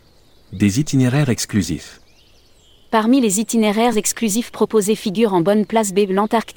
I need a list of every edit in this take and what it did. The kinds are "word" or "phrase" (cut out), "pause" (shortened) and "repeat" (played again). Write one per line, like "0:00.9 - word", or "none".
none